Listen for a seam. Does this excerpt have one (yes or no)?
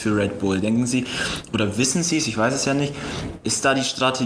no